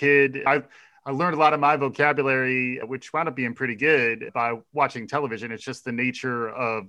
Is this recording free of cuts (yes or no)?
yes